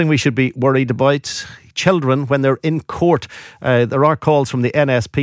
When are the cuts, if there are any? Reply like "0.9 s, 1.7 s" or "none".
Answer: none

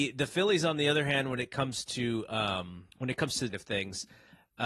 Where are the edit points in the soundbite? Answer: 2.9 s, 3.5 s

